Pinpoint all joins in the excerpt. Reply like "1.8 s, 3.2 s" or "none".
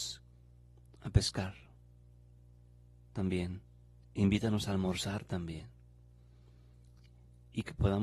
none